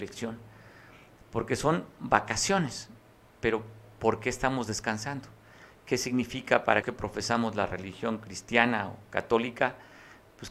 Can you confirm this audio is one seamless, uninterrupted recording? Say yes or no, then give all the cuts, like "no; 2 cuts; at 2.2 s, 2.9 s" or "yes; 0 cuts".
no; 1 cut; at 6.8 s